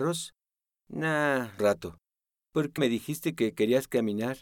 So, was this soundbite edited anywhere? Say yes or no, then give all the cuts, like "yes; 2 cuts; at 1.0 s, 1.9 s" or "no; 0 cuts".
yes; 2 cuts; at 1.6 s, 2.8 s